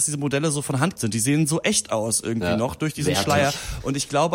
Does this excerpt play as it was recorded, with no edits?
no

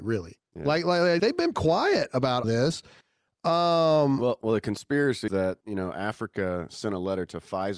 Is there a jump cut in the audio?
yes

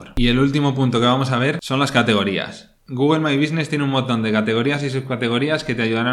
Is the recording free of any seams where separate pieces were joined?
yes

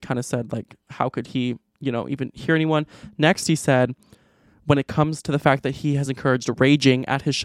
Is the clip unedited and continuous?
yes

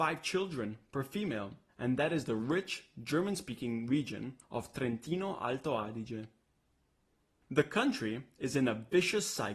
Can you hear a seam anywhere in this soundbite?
no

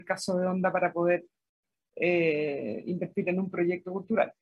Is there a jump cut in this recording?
no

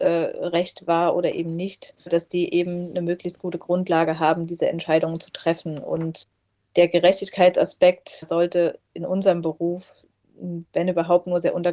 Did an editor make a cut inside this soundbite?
no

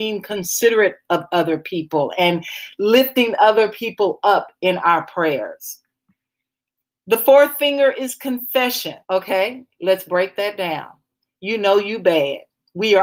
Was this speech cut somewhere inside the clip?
yes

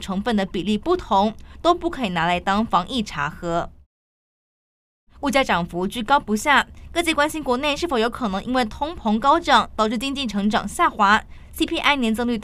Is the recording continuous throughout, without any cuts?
yes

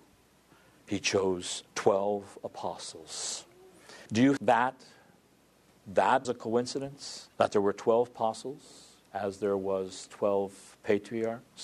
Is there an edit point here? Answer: yes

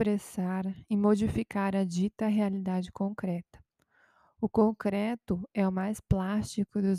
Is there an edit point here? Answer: no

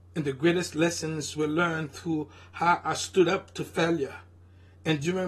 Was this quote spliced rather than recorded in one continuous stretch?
no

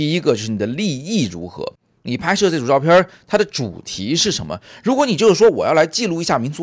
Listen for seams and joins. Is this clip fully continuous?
yes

